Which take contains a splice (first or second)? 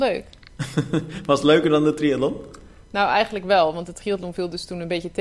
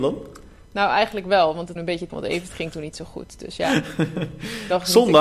second